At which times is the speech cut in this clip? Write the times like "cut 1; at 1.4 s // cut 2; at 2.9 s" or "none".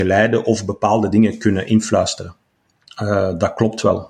none